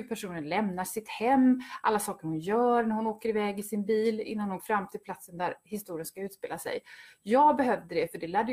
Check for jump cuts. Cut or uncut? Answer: cut